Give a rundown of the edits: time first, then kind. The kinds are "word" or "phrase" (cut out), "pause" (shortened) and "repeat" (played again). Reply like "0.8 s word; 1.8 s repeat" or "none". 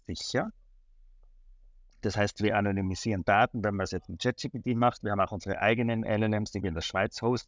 none